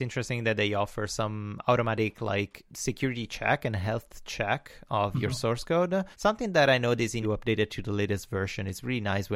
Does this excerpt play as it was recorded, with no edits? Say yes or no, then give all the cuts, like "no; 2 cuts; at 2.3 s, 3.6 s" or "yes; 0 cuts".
no; 3 cuts; at 2.7 s, 6.1 s, 7.2 s